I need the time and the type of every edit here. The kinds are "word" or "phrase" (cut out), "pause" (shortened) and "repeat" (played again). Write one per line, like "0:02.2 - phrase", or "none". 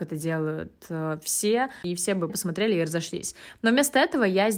0:02.3 - word